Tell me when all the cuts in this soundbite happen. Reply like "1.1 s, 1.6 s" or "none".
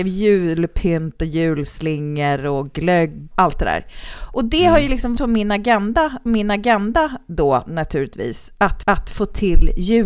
3.3 s, 5.2 s, 6.3 s, 8.8 s